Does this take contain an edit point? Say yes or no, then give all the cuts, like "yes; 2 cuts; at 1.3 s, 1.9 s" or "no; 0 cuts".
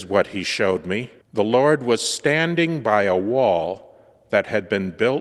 yes; 1 cut; at 1.2 s